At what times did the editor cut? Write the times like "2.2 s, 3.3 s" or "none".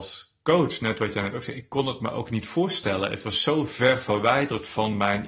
none